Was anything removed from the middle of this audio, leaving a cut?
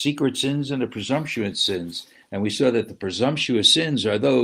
no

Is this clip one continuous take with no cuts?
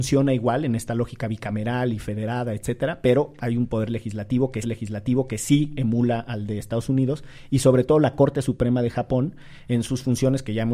no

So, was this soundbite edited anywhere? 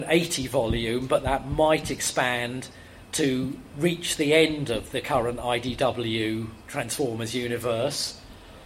yes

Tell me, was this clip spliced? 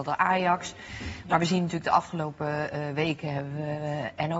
no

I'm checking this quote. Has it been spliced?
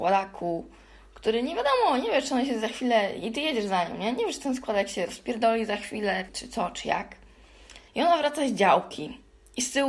yes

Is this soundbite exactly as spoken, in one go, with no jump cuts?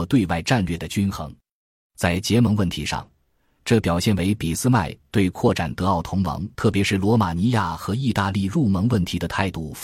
no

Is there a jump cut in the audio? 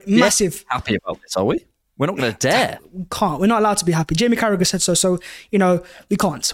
no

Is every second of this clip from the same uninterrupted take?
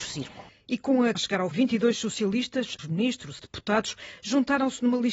no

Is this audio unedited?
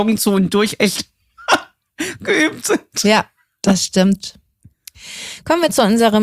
yes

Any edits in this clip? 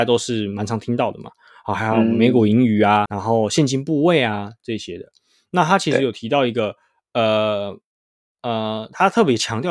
yes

